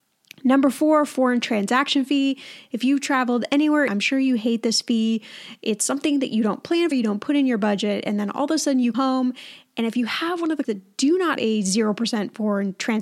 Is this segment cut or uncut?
cut